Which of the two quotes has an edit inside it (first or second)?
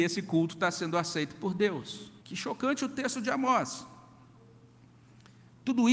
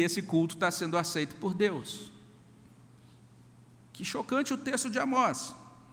first